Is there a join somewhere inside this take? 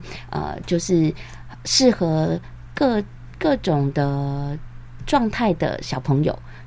no; 0 cuts

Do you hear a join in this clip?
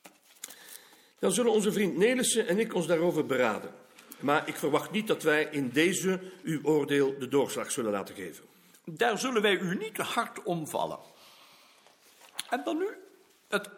no; 0 cuts

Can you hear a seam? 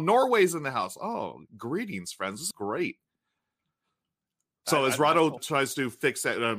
yes; 3 cuts; at 1.5 s, 2.5 s, 5.4 s

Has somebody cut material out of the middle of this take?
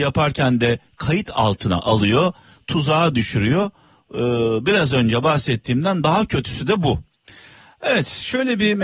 no; 0 cuts

